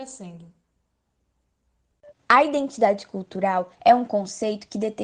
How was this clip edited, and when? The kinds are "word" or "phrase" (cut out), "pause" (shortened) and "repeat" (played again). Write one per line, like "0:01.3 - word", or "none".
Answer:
0:02.2 - pause
0:03.7 - pause